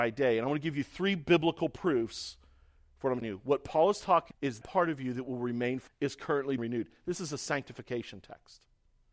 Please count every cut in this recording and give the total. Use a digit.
5